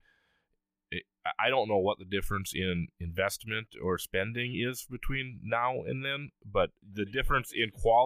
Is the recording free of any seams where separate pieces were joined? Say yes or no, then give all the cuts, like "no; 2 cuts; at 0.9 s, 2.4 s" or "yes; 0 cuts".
no; 2 cuts; at 2.9 s, 6.8 s